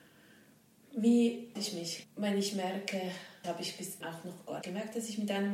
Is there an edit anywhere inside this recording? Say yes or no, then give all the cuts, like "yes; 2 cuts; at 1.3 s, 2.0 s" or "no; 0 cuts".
yes; 5 cuts; at 1.6 s, 2.0 s, 3.4 s, 4.0 s, 4.6 s